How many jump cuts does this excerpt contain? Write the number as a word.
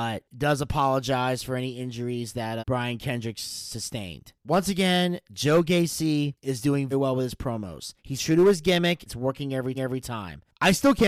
five